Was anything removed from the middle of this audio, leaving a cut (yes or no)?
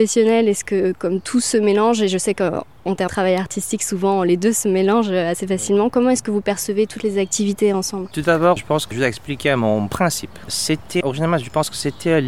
yes